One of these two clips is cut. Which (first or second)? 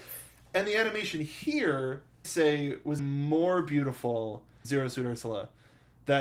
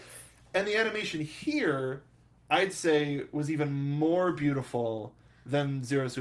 first